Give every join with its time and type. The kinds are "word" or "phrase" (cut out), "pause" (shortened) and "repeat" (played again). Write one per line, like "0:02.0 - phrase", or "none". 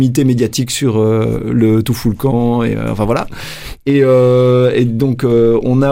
none